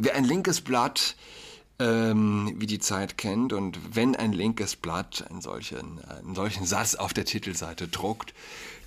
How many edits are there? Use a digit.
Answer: 0